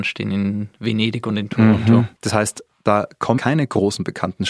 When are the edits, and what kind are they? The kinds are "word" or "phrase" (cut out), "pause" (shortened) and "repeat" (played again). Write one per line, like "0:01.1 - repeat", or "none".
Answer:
0:02.2 - pause
0:03.4 - word